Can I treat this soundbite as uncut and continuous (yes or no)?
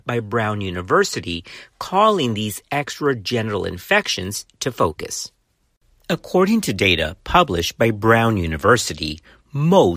yes